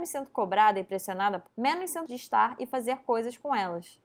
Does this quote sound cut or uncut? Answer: cut